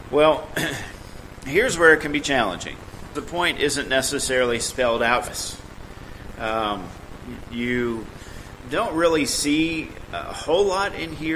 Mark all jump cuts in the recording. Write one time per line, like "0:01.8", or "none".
0:03.1
0:05.3
0:08.6